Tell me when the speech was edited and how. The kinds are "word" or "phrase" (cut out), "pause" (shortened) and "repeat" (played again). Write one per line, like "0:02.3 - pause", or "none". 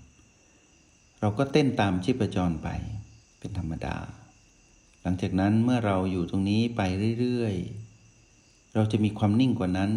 0:03.2 - pause

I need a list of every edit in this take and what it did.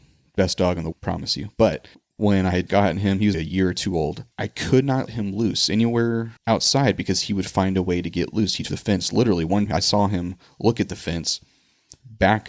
0:00.9 - word
0:01.9 - pause
0:02.7 - word
0:03.3 - word
0:04.3 - pause
0:05.1 - word
0:06.4 - pause
0:08.7 - phrase
0:09.7 - word

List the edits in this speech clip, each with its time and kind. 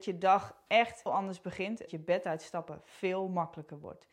0:01.1 - word
0:01.9 - word

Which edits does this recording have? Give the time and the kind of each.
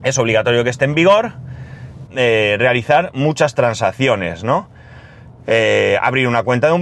0:02.1 - phrase

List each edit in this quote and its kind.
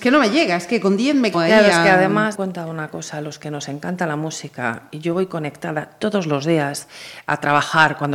0:01.3 - word
0:02.3 - word

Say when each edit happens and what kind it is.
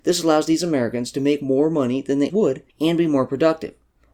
0:02.3 - word
0:02.7 - pause

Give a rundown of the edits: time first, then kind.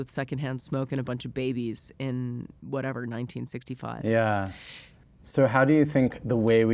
none

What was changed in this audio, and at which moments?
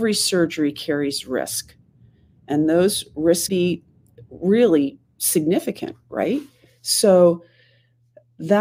0:03.5 - word

